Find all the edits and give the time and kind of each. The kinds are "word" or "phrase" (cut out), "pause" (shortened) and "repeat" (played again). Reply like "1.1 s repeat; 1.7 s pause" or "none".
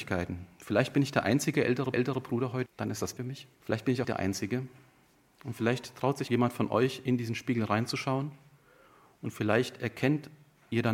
1.9 s repeat; 2.7 s word; 3.2 s word; 3.5 s pause; 4.0 s phrase; 6.3 s word